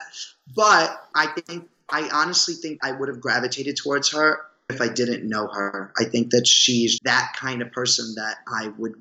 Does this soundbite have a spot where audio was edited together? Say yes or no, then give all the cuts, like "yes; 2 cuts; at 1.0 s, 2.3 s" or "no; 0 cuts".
yes; 4 cuts; at 1.1 s, 2.8 s, 4.7 s, 7.0 s